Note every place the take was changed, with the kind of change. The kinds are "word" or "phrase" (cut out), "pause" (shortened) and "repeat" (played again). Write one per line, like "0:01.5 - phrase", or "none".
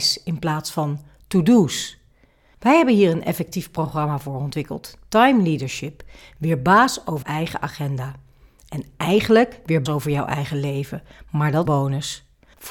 0:07.2 - word
0:09.9 - word
0:11.7 - phrase